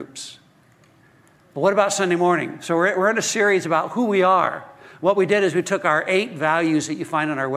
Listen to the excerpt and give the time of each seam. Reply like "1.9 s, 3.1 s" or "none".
none